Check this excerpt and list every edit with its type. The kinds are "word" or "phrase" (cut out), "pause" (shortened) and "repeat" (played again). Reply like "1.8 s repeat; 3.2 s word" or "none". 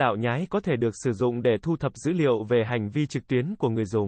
none